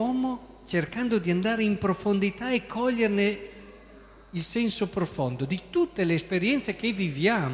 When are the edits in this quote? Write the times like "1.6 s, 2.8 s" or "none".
none